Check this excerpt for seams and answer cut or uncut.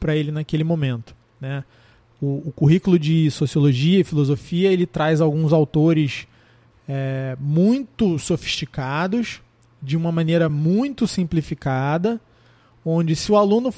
uncut